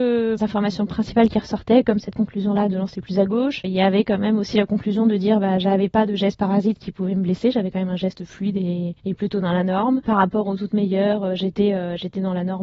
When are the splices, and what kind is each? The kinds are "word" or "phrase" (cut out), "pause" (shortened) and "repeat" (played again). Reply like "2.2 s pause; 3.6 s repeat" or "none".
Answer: none